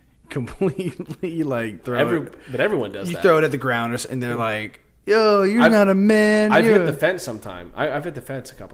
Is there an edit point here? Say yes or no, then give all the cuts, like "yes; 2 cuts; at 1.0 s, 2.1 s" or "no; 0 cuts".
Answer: no; 0 cuts